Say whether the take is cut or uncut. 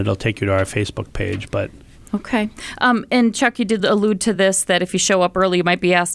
uncut